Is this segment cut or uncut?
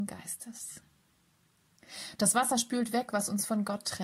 uncut